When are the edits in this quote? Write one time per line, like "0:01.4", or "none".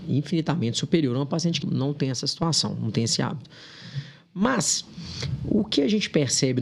0:01.6

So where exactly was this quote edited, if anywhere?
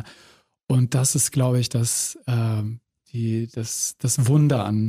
none

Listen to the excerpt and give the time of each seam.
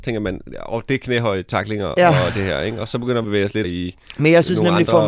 0:03.2
0:03.6

